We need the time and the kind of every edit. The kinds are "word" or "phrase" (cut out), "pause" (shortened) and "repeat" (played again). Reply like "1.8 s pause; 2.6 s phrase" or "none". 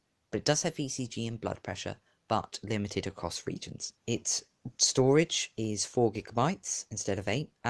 4.0 s pause